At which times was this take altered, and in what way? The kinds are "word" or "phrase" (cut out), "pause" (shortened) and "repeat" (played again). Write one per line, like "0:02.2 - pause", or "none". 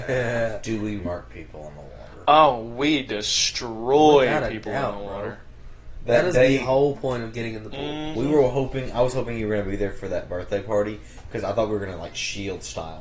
0:01.0 - word